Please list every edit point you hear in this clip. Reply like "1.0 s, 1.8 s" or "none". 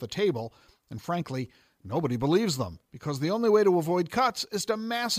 none